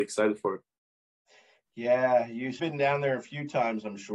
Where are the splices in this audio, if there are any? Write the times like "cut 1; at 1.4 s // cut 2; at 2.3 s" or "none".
cut 1; at 2.6 s